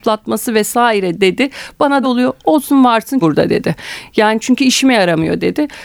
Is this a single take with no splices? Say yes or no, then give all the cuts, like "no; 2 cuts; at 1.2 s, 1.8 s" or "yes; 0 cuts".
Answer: no; 2 cuts; at 2.0 s, 3.2 s